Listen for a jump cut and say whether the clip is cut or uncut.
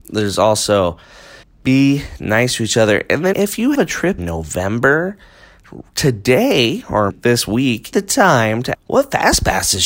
cut